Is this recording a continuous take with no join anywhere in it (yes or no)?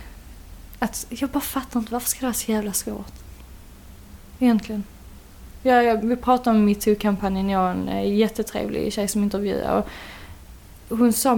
yes